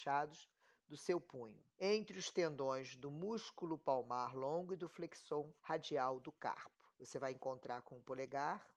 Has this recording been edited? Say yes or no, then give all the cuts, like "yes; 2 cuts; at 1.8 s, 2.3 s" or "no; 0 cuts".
yes; 3 cuts; at 1.7 s, 5.6 s, 6.9 s